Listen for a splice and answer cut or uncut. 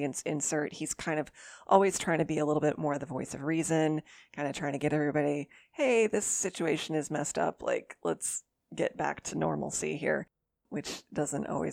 uncut